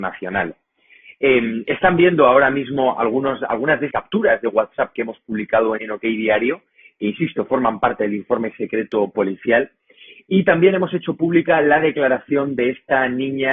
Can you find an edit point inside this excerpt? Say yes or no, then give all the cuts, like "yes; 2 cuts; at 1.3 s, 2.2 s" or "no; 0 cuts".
yes; 2 cuts; at 3.9 s, 5.8 s